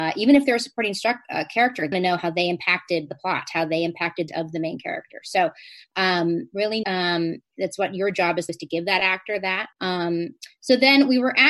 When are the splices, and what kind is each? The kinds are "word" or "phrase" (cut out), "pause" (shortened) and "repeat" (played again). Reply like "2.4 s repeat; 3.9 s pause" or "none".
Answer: 1.9 s phrase; 4.3 s phrase; 6.8 s phrase; 8.5 s phrase; 9.7 s pause